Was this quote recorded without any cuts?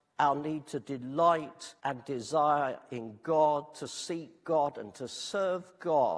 no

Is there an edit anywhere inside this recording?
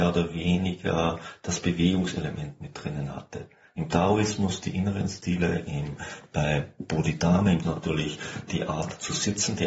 yes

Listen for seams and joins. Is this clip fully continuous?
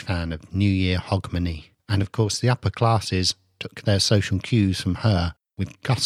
yes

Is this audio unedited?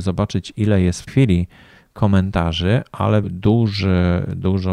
no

